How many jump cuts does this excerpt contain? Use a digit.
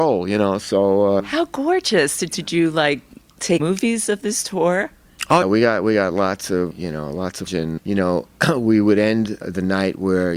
8